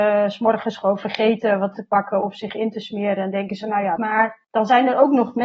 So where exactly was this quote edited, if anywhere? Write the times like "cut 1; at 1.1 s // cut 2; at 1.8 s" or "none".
cut 1; at 1.8 s // cut 2; at 4.0 s // cut 3; at 4.4 s